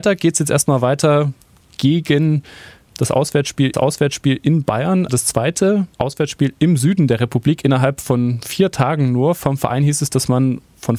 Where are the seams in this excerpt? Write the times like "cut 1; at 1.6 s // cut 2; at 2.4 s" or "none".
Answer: cut 1; at 2.9 s // cut 2; at 3.7 s // cut 3; at 5.1 s // cut 4; at 5.9 s